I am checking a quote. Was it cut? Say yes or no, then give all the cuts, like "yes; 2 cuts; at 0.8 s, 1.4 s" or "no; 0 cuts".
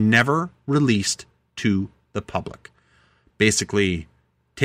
no; 0 cuts